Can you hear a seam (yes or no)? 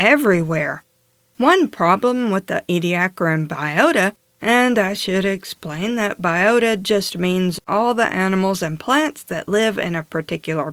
no